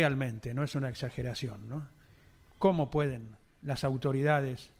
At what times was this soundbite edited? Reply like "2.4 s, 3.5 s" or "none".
none